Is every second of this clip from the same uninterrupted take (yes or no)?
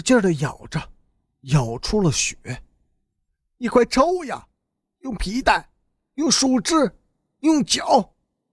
yes